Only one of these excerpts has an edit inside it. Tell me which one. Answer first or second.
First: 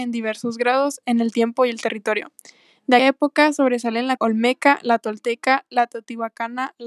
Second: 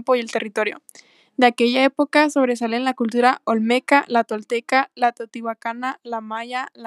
first